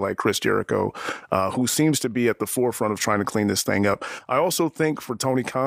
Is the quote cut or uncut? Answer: uncut